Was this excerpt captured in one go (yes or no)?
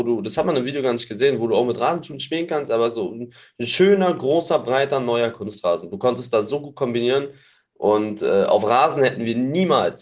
yes